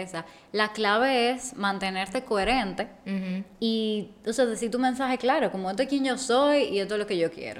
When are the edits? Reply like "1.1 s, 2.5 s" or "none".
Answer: none